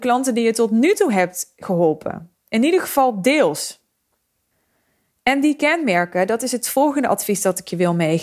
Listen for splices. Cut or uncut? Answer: uncut